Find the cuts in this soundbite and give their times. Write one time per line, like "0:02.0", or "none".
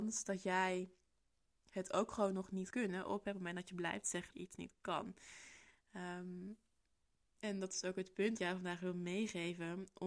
0:02.7
0:04.3
0:08.4